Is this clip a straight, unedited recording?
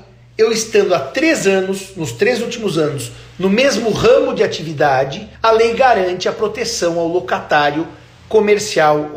no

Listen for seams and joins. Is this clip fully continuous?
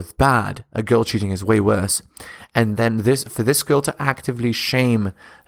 yes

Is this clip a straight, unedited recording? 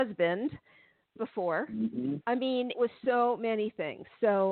no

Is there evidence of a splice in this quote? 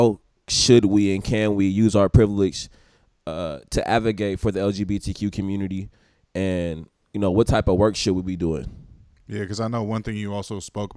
no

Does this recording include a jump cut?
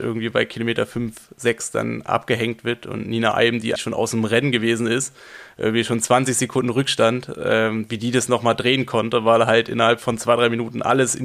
yes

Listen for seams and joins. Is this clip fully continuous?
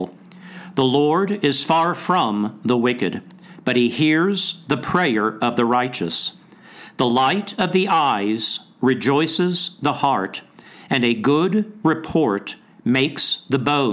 yes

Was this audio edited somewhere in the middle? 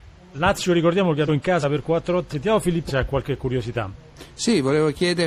yes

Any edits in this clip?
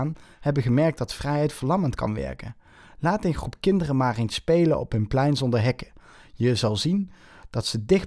no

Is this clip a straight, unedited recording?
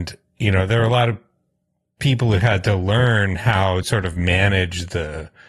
no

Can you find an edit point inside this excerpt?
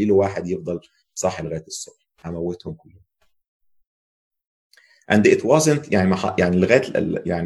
no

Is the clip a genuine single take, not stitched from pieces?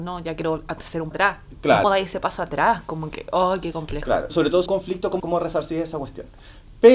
no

